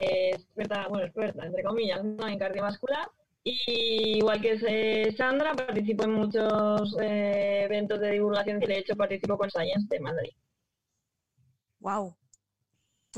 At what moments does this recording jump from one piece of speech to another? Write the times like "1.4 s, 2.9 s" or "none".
3.2 s, 8.6 s, 9.5 s